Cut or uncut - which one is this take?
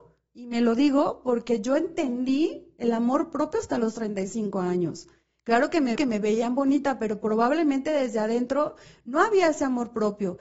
cut